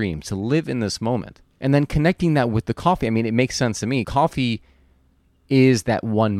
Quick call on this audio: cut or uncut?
cut